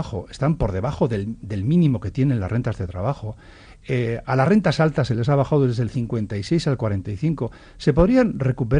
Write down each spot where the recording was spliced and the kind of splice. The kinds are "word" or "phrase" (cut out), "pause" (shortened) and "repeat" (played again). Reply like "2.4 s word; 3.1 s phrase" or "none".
none